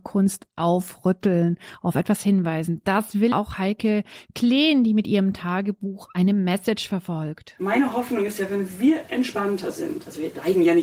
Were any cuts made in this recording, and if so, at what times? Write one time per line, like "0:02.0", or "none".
0:03.3